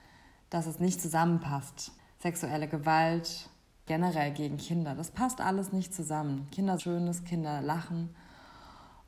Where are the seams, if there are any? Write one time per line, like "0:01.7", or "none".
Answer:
0:02.0
0:03.9
0:06.8